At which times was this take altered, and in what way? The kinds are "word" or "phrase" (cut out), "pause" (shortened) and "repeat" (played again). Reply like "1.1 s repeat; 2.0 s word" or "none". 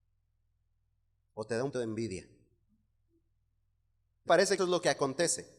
1.7 s word; 4.3 s word; 4.6 s word